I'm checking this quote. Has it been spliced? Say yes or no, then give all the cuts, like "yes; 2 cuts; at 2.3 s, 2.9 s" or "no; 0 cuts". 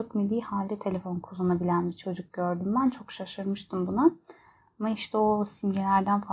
no; 0 cuts